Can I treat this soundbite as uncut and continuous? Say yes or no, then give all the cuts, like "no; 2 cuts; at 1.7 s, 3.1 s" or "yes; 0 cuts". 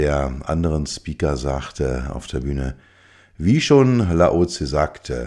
yes; 0 cuts